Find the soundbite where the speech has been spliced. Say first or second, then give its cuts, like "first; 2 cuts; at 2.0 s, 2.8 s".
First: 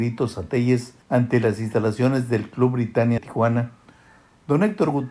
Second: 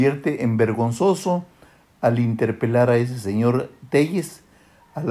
first; 2 cuts; at 1.0 s, 3.2 s